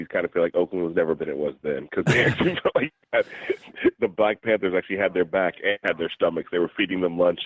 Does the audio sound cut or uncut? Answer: cut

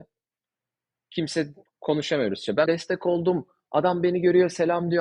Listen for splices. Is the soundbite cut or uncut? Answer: cut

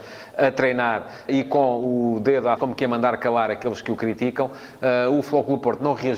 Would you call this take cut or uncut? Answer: cut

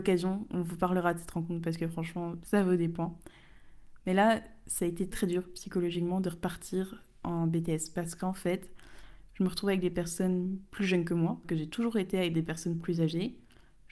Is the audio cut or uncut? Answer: cut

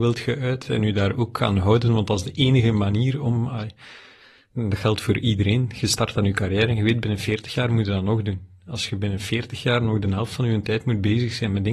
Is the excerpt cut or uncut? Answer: uncut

